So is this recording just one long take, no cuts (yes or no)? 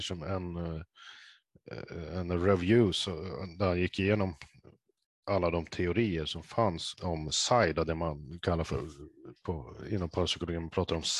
no